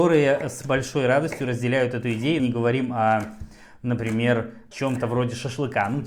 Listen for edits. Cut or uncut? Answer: cut